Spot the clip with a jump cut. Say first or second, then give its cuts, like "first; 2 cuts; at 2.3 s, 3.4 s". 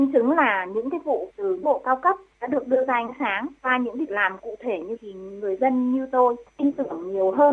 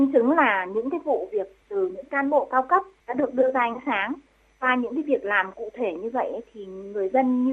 first; 5 cuts; at 1.3 s, 1.6 s, 3.6 s, 4.1 s, 5.0 s